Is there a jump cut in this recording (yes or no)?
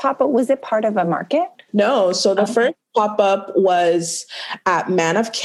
no